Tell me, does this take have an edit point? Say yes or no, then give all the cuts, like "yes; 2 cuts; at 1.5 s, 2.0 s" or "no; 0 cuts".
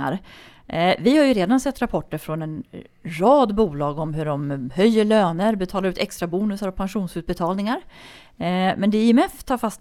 no; 0 cuts